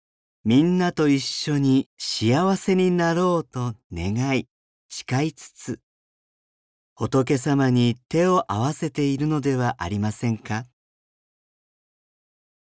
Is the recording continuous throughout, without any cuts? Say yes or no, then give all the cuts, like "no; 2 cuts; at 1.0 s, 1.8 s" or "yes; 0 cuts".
yes; 0 cuts